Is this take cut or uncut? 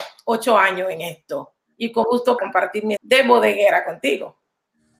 cut